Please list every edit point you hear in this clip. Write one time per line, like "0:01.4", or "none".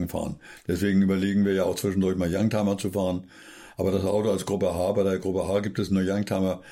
none